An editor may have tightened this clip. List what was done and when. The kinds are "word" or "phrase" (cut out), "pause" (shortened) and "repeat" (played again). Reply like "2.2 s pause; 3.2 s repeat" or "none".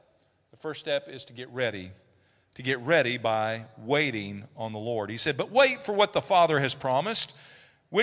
none